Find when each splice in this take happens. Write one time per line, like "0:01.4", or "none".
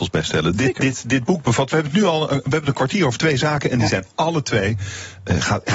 none

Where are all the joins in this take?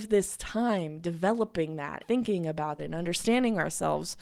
0:02.0
0:02.8

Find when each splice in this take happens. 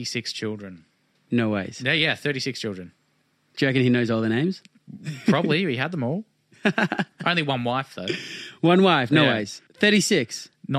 none

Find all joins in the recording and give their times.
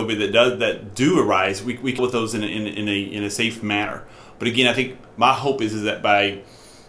0:02.0
0:02.5

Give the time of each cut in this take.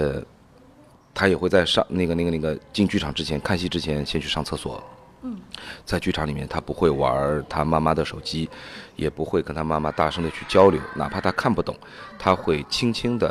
none

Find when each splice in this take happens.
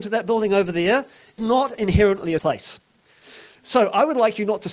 0:01.4
0:02.4

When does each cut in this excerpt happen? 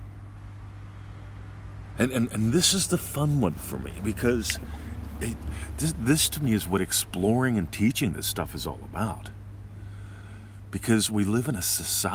none

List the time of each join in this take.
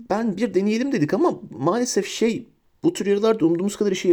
none

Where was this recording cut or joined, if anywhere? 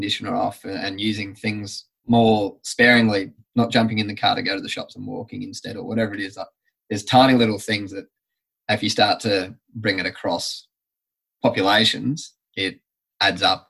none

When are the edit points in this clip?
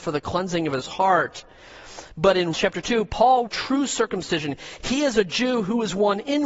0:02.5
0:03.5
0:04.8

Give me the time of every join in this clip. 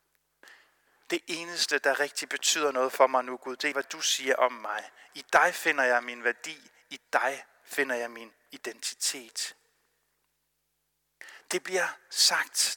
0:03.7

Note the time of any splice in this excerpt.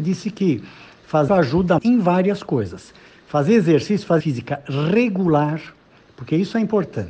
0:01.3
0:01.8
0:04.2

